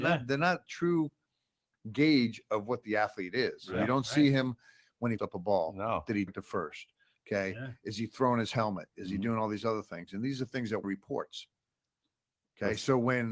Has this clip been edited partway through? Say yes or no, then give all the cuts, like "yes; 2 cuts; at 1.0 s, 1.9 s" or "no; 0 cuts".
yes; 3 cuts; at 5.2 s, 6.3 s, 10.8 s